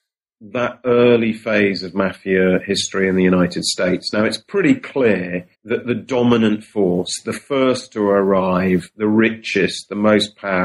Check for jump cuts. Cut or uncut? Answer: cut